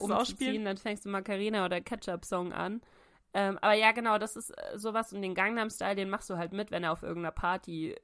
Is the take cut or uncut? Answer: uncut